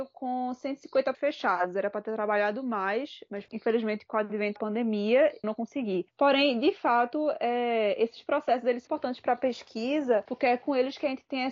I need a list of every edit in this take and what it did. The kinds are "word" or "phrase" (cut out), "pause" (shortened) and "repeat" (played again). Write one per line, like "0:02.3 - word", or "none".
0:01.1 - word
0:04.6 - word
0:05.4 - word
0:08.9 - word